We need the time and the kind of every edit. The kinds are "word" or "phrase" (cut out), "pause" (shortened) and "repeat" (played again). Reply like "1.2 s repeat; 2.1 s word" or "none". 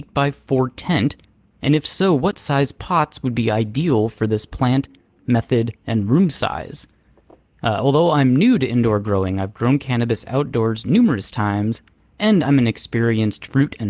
none